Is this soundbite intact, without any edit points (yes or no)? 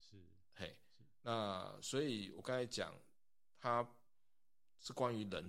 yes